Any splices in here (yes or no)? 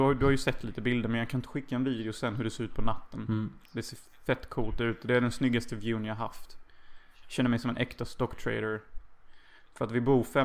no